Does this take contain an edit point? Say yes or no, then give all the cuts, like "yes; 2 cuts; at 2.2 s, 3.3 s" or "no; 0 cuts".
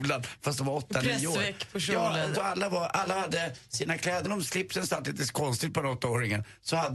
yes; 2 cuts; at 2.3 s, 4.2 s